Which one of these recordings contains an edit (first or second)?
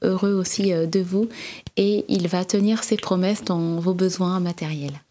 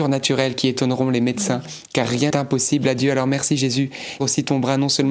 second